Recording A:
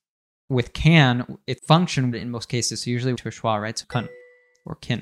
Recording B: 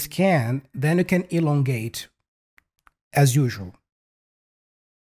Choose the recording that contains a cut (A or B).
A